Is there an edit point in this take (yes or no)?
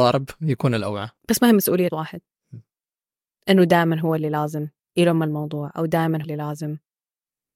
yes